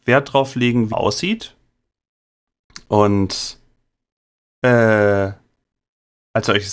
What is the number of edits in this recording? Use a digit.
1